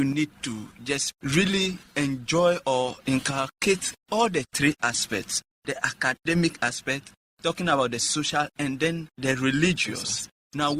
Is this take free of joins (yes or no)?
yes